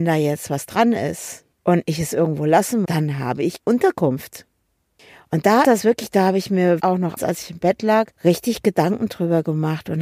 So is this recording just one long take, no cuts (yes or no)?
no